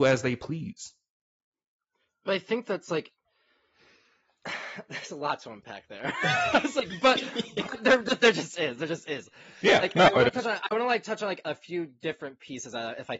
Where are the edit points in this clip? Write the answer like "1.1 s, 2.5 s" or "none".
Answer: none